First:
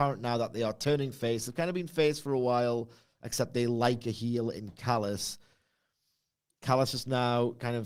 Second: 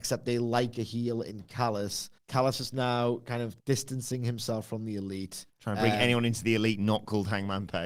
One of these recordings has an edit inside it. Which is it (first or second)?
second